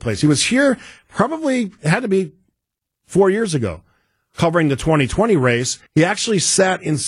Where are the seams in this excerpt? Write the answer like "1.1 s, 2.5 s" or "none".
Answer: 5.9 s